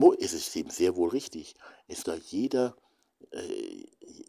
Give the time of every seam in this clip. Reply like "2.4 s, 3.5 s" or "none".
2.0 s